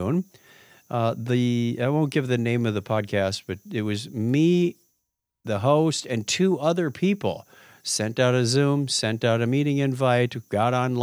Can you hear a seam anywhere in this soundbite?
no; 0 cuts

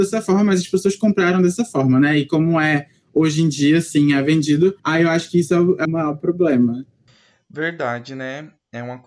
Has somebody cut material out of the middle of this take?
yes; 2 cuts; at 4.8 s, 5.8 s

